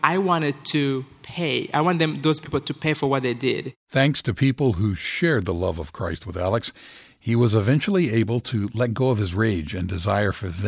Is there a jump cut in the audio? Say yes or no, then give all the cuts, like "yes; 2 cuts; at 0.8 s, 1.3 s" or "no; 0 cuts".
yes; 1 cut; at 3.8 s